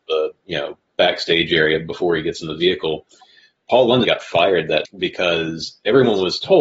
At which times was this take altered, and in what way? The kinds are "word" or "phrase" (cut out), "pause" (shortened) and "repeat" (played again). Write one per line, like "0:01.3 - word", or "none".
0:04.0 - word
0:04.8 - word